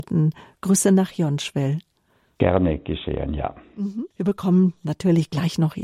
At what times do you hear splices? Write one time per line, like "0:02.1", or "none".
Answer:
0:04.1